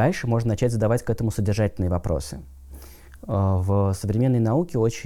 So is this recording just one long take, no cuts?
yes; 0 cuts

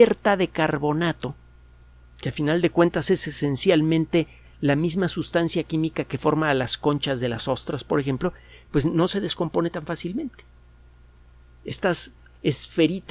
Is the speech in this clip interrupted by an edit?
no; 0 cuts

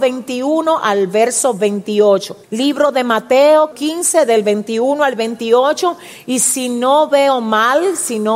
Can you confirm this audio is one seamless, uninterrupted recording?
no; 2 cuts; at 2.4 s, 3.7 s

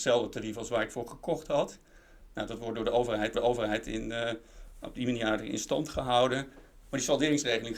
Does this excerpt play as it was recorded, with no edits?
no; 1 cut; at 3.3 s

